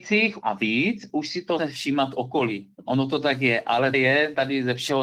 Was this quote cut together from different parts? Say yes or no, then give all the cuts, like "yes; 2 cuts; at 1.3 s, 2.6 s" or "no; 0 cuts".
yes; 3 cuts; at 1.6 s, 2.7 s, 3.9 s